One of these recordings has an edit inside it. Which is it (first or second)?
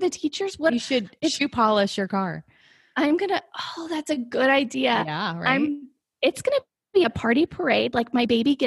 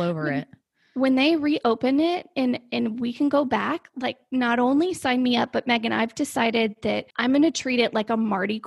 second